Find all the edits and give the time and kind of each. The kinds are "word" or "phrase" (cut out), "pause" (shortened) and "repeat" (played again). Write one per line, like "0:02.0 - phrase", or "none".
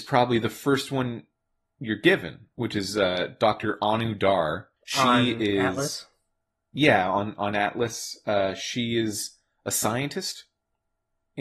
0:04.8 - pause